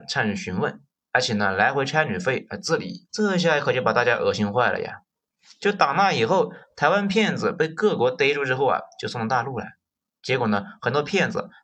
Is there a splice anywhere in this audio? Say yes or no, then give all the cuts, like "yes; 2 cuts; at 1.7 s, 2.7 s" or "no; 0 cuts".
yes; 2 cuts; at 2.5 s, 3.1 s